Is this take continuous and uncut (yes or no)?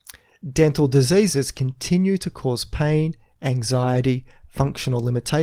yes